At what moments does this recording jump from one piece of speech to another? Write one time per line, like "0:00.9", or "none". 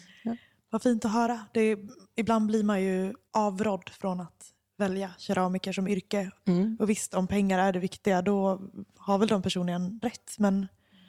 0:03.3
0:10.0